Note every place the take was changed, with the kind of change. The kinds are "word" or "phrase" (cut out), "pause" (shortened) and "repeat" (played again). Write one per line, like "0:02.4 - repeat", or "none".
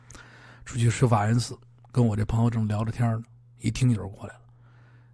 none